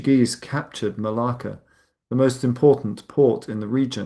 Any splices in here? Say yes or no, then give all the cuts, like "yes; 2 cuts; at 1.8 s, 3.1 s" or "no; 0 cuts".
no; 0 cuts